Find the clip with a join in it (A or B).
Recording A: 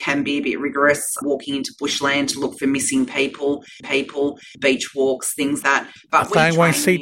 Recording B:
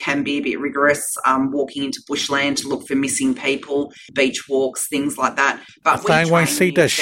A